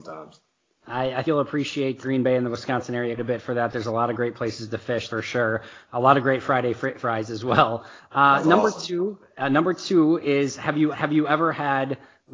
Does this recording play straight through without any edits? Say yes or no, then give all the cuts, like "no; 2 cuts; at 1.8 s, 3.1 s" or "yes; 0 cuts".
no; 6 cuts; at 1.2 s, 2.0 s, 3.2 s, 5.1 s, 7.0 s, 10.9 s